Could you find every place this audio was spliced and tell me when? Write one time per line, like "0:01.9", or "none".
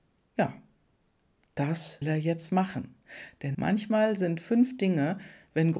0:02.0
0:03.5